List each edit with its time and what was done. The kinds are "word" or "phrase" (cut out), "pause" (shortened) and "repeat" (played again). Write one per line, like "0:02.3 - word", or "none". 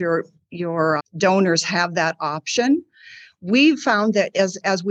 0:01.0 - word